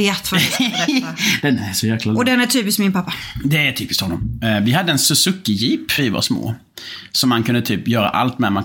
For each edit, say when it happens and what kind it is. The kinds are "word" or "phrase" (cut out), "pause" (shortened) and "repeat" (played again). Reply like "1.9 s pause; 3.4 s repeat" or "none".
6.0 s word